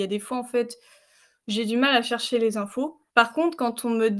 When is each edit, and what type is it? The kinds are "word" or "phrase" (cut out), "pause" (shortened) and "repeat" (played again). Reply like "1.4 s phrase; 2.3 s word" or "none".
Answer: 3.1 s pause